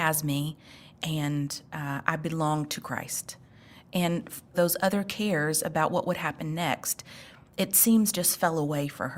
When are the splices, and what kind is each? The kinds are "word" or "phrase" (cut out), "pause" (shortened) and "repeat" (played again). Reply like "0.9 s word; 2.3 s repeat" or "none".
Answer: 4.5 s phrase